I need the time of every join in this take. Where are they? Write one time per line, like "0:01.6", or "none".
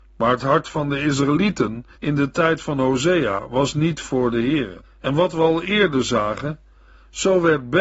0:01.9
0:04.8